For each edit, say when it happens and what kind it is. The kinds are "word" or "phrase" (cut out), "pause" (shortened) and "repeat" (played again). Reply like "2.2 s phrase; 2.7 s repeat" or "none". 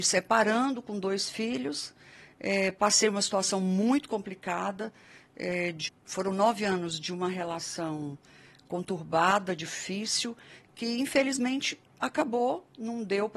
5.9 s word